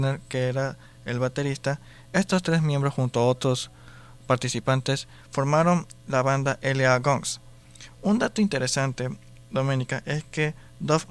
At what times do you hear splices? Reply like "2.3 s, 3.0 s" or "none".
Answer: none